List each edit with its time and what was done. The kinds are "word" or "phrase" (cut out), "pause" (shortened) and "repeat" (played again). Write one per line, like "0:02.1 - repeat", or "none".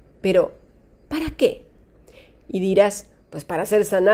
none